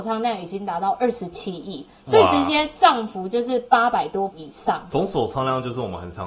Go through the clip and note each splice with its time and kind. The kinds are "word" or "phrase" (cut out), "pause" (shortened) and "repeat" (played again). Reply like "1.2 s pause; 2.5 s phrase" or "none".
4.3 s word